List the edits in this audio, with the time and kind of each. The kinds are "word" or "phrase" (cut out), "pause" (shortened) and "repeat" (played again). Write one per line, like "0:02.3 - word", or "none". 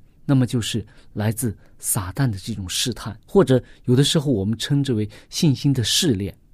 0:03.2 - pause

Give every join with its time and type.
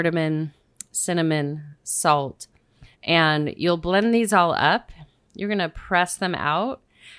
0:02.9 - pause

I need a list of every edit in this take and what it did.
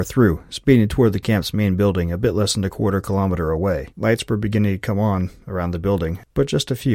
0:03.9 - pause

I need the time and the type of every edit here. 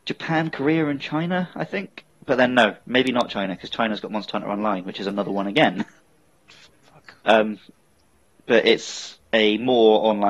none

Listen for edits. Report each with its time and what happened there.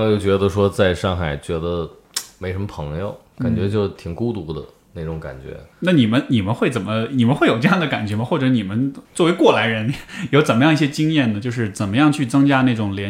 0:05.7 - pause
0:09.0 - pause

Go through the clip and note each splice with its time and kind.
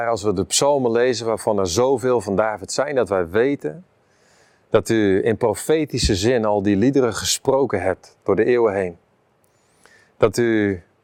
none

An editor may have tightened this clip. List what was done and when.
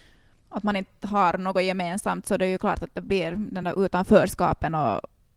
none

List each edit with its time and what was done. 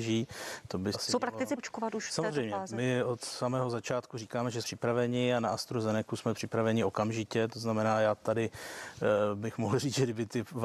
0:00.9 - word
0:01.6 - word
0:04.6 - word

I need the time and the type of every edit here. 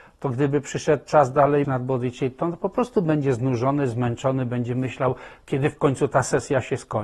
0:01.6 - word

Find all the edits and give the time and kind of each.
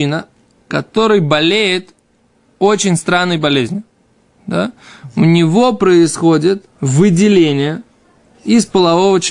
0:06.7 - pause

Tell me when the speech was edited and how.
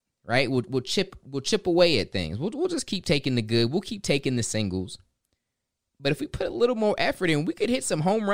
none

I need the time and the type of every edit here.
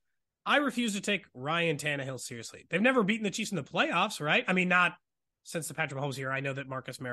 none

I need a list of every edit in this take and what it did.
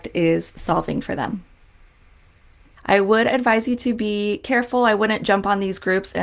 none

